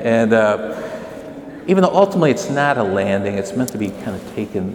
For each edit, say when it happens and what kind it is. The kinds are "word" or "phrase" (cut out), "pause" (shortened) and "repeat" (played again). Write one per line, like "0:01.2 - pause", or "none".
none

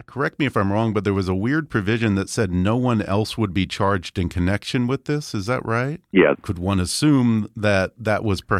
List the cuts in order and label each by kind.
none

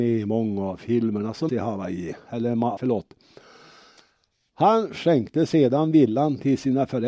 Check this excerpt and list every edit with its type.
0:01.5 - word
0:02.8 - word

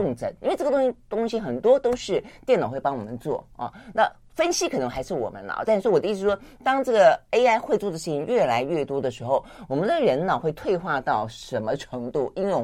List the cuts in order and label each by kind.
none

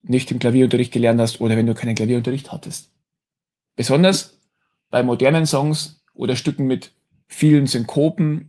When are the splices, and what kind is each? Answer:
none

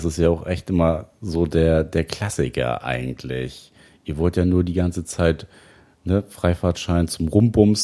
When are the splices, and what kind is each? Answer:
none

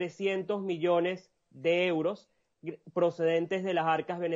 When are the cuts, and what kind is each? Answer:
none

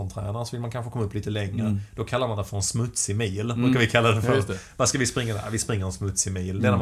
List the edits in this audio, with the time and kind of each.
none

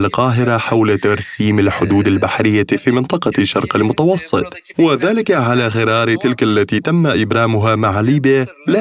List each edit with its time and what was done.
none

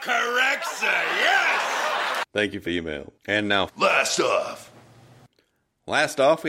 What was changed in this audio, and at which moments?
0:02.3 - pause
0:02.7 - word
0:03.2 - pause
0:03.7 - word

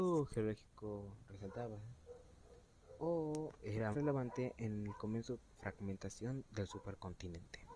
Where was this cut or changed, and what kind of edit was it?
0:03.9 - word
0:05.6 - phrase

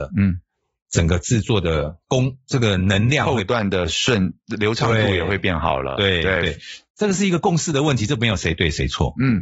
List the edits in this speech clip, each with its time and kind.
0:02.0 - pause

